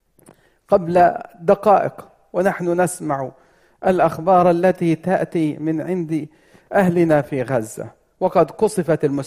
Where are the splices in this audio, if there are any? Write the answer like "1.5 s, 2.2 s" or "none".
none